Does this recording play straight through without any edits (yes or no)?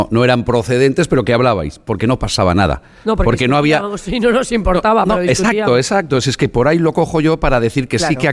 yes